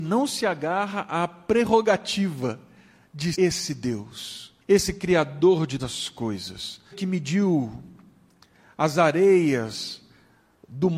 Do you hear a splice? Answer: yes; 4 cuts; at 3.3 s, 4.6 s, 5.8 s, 6.9 s

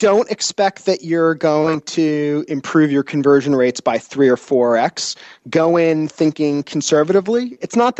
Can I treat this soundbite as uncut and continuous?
yes; 0 cuts

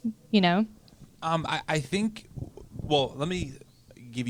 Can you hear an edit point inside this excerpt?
no; 0 cuts

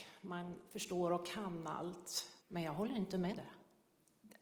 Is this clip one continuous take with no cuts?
no; 2 cuts; at 2.4 s, 3.3 s

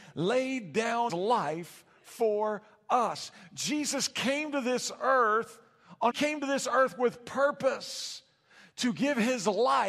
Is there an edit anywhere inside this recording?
yes; 2 cuts; at 1.1 s, 6.1 s

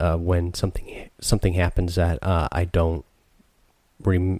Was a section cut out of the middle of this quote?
yes; 1 cut; at 1.1 s

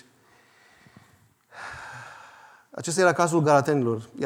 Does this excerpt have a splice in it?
no; 0 cuts

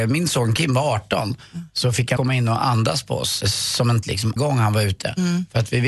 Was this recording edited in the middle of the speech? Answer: yes; 4 cuts; at 2.2 s, 3.4 s, 4.0 s, 4.4 s

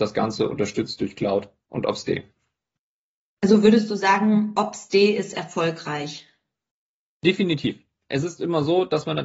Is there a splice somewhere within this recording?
no; 0 cuts

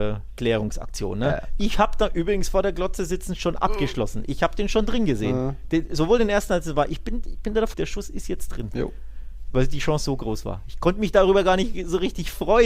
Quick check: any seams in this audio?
yes; 1 cut; at 7.7 s

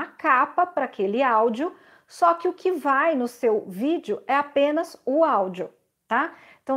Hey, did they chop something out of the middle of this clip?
no; 0 cuts

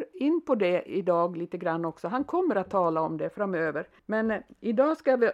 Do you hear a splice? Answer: yes; 1 cut; at 4.0 s

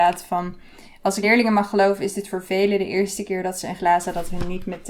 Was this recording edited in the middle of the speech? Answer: yes; 2 cuts; at 1.2 s, 3.8 s

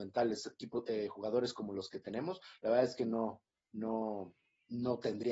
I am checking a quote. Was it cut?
no; 0 cuts

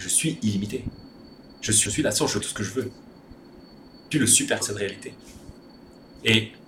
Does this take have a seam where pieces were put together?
yes; 4 cuts; at 1.9 s, 2.4 s, 4.1 s, 4.6 s

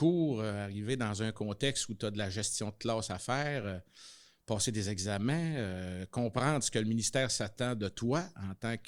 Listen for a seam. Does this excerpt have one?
no; 0 cuts

